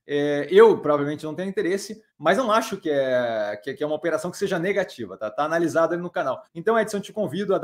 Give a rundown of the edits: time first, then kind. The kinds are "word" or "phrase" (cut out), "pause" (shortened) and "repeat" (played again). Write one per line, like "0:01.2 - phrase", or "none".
0:02.1 - pause
0:06.5 - pause